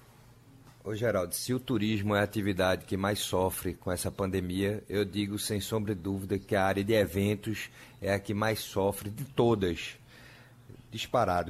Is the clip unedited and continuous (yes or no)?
yes